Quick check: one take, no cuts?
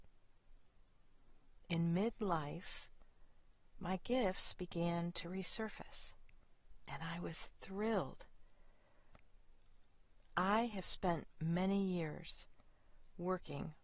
yes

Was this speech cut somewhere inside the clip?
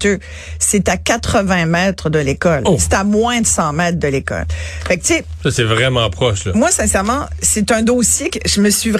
no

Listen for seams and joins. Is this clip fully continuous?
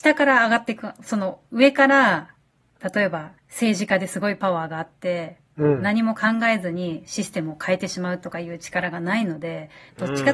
no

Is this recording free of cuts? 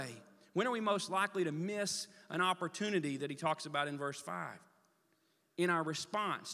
yes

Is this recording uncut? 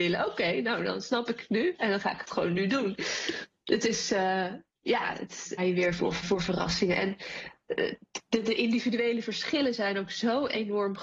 no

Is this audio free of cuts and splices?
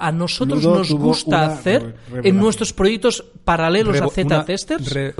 yes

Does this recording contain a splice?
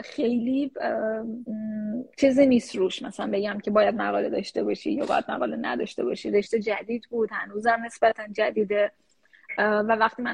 no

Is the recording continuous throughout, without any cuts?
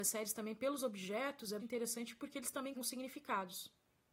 no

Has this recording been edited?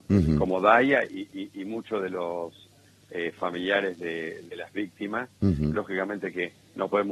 no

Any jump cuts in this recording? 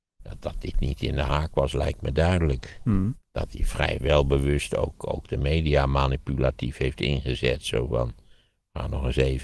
no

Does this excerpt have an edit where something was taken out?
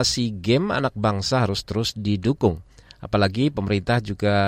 no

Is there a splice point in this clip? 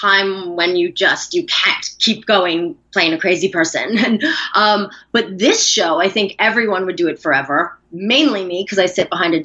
no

